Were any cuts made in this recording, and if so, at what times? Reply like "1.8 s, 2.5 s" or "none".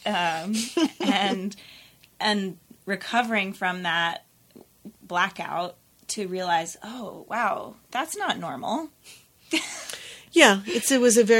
7.9 s